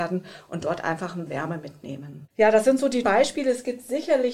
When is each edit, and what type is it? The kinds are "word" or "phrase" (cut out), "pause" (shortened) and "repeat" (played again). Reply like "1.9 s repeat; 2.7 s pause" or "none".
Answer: 1.3 s word; 2.3 s pause; 3.0 s word